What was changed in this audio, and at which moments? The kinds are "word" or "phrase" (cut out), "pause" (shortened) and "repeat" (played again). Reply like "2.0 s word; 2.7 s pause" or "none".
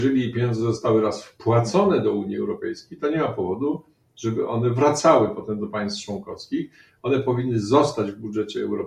none